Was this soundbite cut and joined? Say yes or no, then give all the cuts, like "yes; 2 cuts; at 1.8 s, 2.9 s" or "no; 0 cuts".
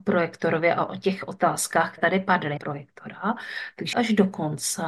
yes; 3 cuts; at 2.0 s, 2.6 s, 3.9 s